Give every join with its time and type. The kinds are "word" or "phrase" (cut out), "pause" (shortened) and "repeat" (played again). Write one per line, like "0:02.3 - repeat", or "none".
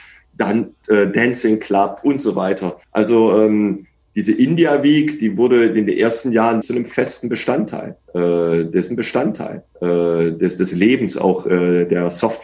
0:02.8 - pause
0:06.6 - word
0:08.9 - repeat